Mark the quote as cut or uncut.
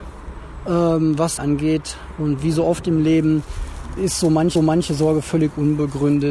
cut